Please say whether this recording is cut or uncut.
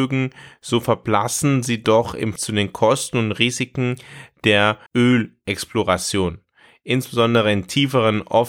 cut